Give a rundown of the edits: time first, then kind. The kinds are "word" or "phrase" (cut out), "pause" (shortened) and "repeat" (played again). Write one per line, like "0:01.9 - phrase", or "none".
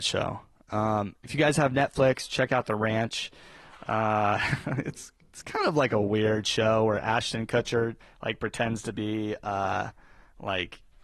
0:08.0 - pause